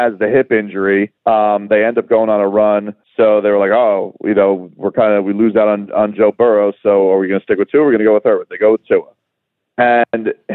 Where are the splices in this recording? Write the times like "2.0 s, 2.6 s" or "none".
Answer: 1.2 s, 3.0 s